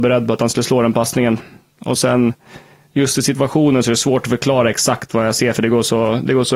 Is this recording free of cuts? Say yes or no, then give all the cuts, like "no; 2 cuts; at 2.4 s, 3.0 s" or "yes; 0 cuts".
yes; 0 cuts